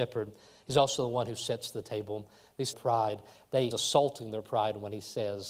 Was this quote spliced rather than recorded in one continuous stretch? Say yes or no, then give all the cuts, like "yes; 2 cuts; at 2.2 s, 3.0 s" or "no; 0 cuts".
yes; 2 cuts; at 2.7 s, 3.7 s